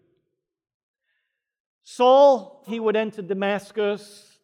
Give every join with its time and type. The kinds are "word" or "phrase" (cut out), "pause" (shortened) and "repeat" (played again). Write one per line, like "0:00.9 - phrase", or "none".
0:02.7 - word